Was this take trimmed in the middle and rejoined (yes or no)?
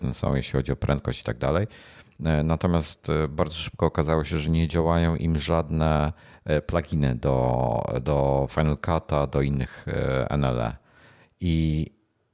no